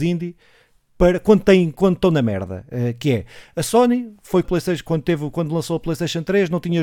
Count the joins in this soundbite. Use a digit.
1